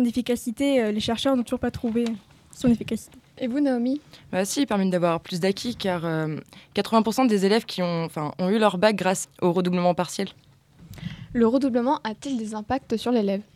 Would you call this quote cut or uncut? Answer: cut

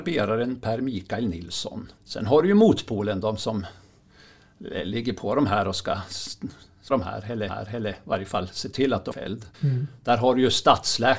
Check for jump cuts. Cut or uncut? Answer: cut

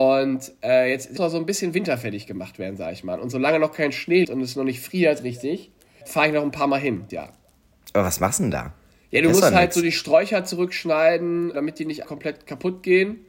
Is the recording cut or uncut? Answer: cut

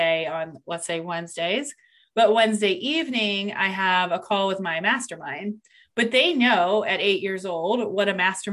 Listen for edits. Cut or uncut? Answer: uncut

